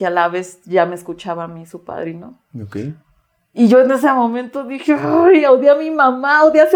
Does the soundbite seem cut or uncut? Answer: uncut